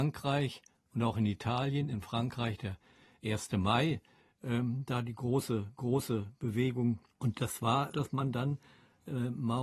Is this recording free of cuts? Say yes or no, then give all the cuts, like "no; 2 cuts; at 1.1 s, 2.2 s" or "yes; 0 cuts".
no; 3 cuts; at 5.8 s, 7.3 s, 7.9 s